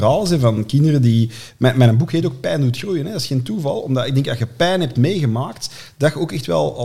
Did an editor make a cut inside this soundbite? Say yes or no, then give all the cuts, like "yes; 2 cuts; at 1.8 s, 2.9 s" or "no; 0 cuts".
no; 0 cuts